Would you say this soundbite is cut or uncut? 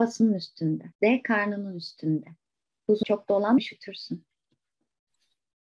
cut